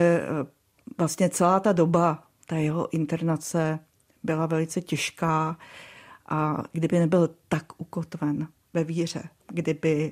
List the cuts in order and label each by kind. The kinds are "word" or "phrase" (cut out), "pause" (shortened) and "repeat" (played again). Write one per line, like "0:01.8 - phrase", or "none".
none